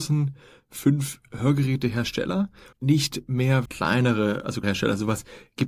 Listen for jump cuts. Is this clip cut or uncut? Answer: cut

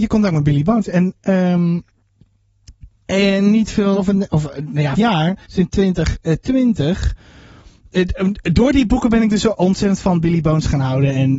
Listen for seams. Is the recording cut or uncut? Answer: cut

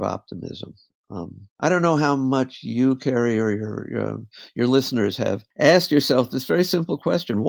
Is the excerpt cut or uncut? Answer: cut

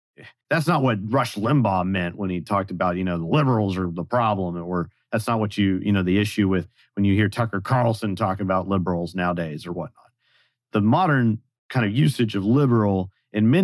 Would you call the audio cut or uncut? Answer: uncut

